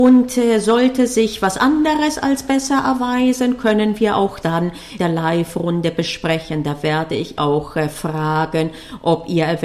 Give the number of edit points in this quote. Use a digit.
3